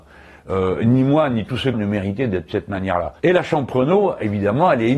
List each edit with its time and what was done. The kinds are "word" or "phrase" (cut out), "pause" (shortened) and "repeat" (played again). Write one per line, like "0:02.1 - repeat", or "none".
0:01.7 - phrase
0:02.5 - word
0:03.2 - pause